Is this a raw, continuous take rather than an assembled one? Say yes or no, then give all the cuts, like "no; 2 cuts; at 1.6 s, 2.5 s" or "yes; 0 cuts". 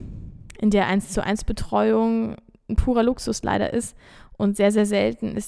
yes; 0 cuts